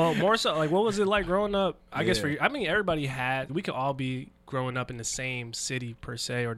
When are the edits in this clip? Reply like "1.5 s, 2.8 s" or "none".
3.5 s